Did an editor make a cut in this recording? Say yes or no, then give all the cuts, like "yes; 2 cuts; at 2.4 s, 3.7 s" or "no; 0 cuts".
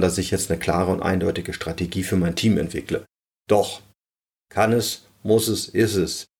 no; 0 cuts